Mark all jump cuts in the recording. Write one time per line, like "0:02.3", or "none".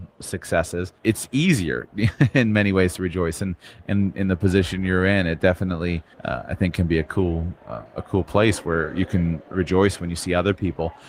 0:01.0
0:06.1